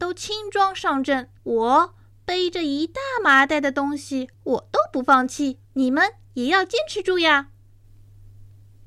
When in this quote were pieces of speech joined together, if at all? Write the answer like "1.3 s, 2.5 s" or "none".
1.4 s, 4.3 s, 5.6 s